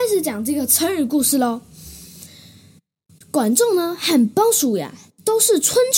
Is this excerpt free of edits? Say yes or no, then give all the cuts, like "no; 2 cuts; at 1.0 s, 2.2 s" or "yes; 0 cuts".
yes; 0 cuts